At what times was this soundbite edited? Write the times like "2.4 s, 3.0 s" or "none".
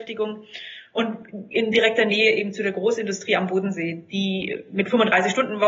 none